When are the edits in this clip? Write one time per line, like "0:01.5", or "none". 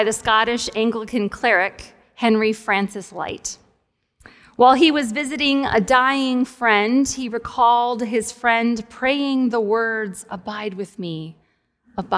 none